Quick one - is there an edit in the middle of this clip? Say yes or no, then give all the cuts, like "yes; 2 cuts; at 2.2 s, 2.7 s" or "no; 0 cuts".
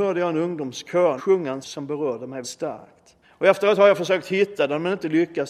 yes; 4 cuts; at 1.2 s, 1.6 s, 2.4 s, 3.2 s